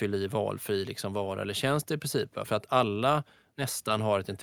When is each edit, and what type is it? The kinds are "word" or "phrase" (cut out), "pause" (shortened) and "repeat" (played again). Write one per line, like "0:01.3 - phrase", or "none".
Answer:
none